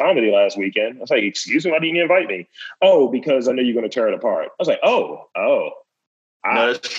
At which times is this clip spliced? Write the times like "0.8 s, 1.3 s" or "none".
5.3 s